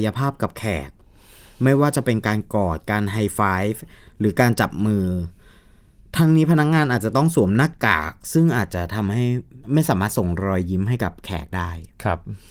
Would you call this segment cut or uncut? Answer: cut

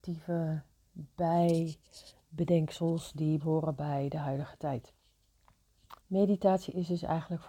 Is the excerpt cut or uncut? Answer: cut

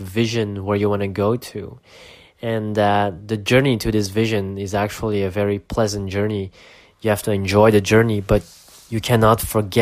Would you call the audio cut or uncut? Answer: uncut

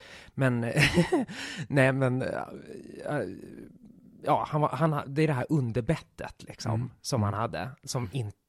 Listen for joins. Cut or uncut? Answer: uncut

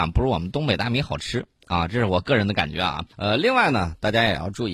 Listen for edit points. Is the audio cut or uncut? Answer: cut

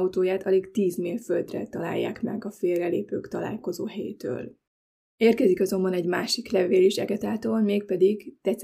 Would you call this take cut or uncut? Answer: uncut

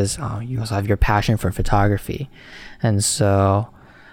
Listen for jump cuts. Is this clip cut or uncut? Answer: uncut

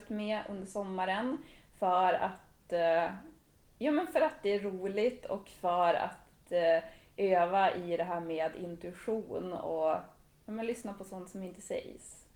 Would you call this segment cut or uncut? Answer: uncut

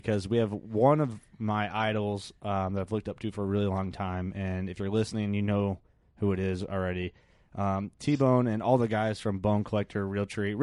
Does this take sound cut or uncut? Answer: uncut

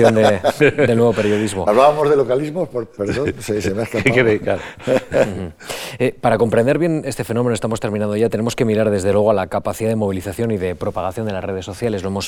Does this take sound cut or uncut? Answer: uncut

